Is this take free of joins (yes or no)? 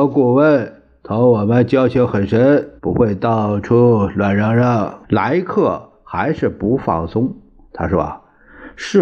no